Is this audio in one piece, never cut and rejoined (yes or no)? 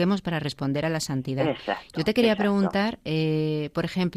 yes